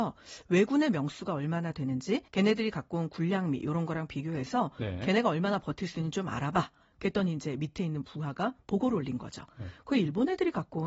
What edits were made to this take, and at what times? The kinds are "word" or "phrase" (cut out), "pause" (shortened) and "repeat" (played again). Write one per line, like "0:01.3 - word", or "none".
0:02.3 - pause